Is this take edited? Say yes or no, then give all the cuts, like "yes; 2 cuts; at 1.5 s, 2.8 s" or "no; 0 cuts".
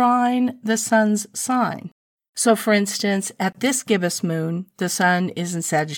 no; 0 cuts